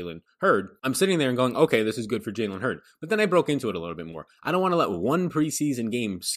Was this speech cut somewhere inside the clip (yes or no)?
no